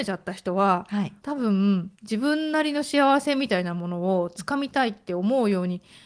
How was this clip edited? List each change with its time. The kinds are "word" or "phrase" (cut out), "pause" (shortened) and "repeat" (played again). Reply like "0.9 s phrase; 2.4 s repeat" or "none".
1.2 s pause; 1.9 s pause